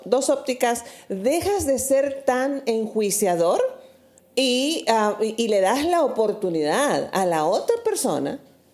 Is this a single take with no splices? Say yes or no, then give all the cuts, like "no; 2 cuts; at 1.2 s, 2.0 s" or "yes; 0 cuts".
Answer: yes; 0 cuts